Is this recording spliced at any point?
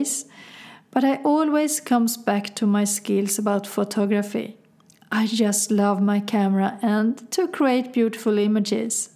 no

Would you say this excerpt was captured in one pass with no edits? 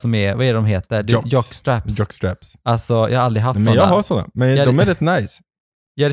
yes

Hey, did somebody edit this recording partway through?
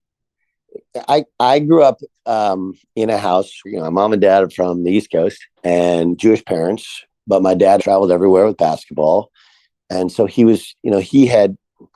yes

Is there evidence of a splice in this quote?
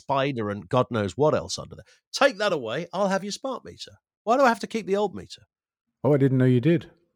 no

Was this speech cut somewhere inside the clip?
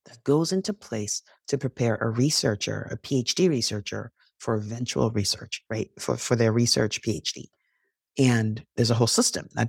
no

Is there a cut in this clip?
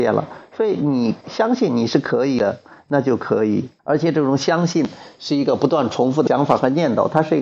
yes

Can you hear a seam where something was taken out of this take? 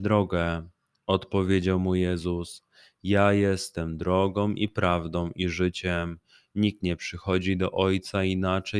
no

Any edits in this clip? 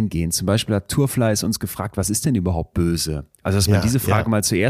no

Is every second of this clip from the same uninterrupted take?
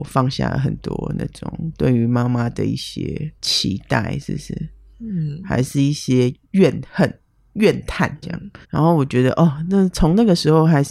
no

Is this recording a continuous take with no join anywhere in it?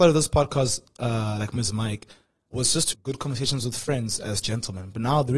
no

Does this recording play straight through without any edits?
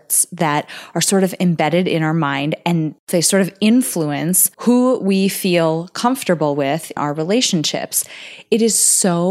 no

